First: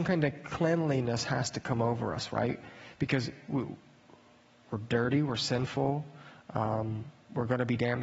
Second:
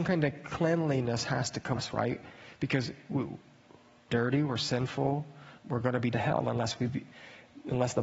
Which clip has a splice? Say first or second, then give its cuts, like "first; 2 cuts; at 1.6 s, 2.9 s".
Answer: second; 4 cuts; at 1.8 s, 4.1 s, 5.6 s, 6.1 s